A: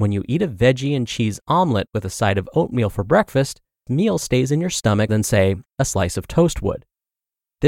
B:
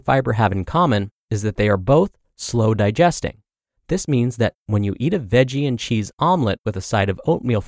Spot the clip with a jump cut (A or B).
A